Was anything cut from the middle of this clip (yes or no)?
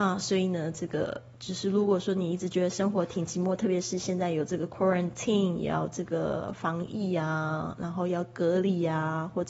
no